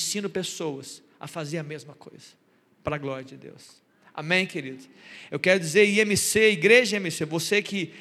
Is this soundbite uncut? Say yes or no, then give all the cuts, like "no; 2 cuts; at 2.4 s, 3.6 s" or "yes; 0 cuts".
yes; 0 cuts